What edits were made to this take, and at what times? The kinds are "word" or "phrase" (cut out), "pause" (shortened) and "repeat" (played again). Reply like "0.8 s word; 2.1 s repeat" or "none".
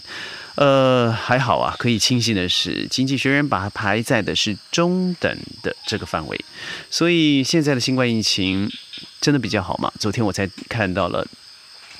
none